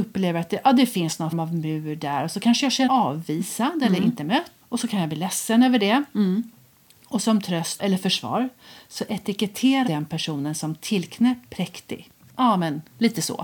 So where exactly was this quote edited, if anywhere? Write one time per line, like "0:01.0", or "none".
0:01.3
0:02.9
0:04.6
0:07.8
0:09.9
0:11.4